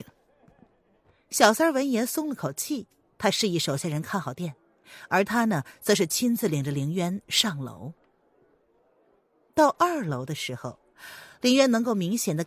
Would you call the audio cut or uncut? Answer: uncut